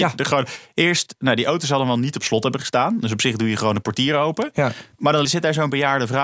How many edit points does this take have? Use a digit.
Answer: 2